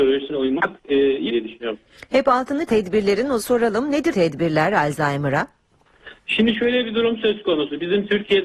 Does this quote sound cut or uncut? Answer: cut